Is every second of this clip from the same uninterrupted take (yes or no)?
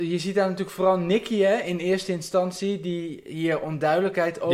yes